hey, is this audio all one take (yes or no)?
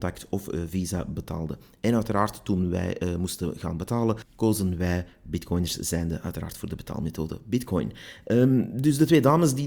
yes